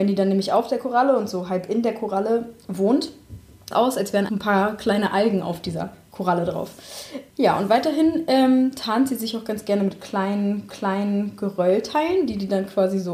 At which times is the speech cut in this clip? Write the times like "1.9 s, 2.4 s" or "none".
3.7 s, 4.3 s, 10.7 s